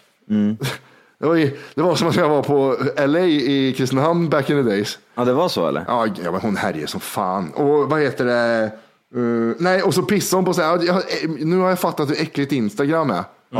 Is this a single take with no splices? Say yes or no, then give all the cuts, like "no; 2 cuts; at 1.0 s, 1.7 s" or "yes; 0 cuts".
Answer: yes; 0 cuts